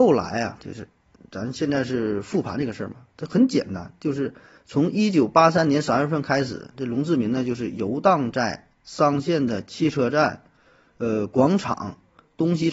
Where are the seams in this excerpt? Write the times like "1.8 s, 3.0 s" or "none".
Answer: none